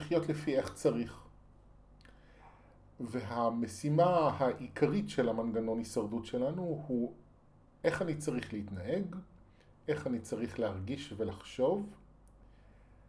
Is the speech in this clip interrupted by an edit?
no; 0 cuts

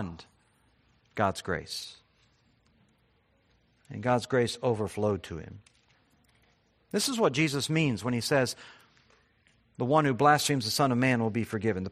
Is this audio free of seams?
yes; 0 cuts

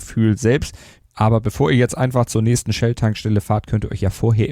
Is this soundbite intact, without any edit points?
yes; 0 cuts

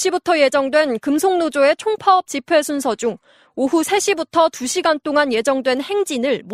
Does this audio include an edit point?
no; 0 cuts

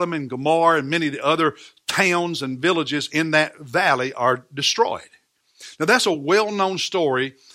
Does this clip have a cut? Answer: no; 0 cuts

